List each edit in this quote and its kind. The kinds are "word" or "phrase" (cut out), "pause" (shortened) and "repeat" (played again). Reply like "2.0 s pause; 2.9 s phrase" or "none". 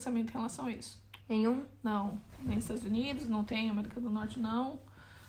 1.2 s pause